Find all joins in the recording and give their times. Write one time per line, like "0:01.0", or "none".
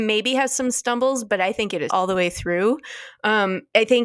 0:01.9